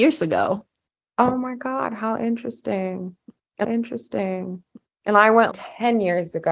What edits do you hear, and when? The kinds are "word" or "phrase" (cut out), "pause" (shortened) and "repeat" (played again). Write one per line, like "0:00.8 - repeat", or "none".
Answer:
0:03.6 - repeat
0:05.5 - word